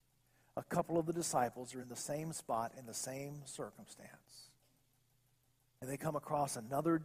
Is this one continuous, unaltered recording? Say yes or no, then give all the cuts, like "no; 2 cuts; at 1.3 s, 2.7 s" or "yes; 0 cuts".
yes; 0 cuts